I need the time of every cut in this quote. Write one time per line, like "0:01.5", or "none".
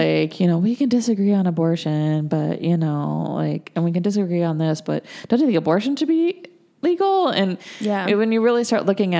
none